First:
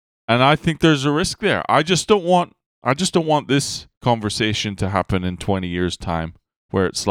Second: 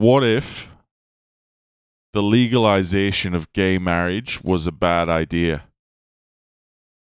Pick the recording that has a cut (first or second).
first